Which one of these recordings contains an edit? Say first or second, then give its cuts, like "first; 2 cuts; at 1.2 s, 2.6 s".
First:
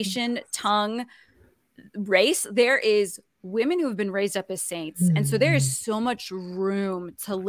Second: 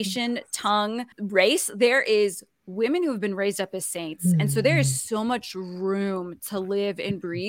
second; 1 cut; at 1.1 s